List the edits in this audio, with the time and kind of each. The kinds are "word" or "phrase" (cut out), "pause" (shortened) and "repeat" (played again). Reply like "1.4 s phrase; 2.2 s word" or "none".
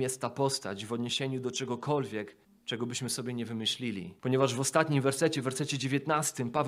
2.4 s pause; 4.2 s pause